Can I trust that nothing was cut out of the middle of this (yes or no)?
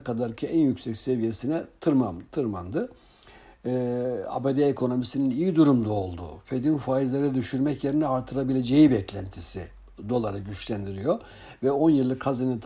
yes